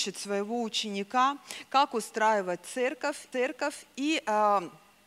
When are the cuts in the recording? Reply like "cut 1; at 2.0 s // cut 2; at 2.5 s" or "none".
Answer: cut 1; at 3.3 s